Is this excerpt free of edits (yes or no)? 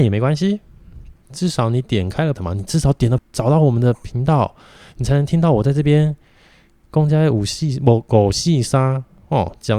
no